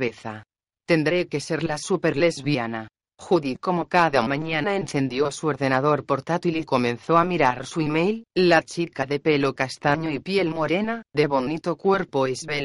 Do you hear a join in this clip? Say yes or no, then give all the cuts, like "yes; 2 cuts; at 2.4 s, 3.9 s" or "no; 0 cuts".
no; 0 cuts